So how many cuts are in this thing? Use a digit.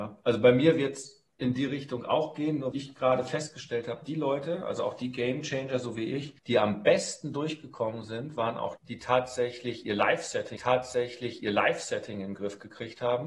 5